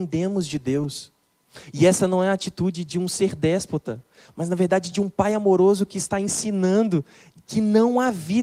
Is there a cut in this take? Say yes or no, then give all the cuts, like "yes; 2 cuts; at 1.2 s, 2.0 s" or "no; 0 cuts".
no; 0 cuts